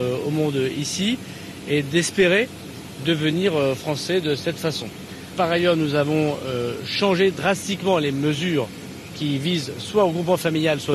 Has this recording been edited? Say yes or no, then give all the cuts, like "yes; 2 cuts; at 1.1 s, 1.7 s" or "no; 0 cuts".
no; 0 cuts